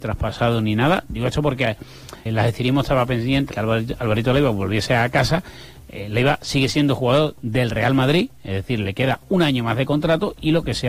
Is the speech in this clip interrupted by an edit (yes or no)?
yes